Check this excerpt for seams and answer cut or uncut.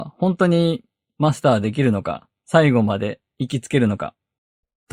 uncut